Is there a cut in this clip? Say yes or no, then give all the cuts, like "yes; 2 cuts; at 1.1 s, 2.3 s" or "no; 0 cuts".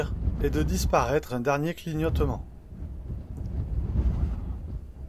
yes; 1 cut; at 1.3 s